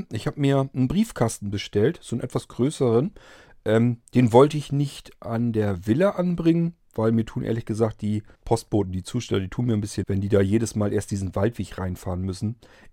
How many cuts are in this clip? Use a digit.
2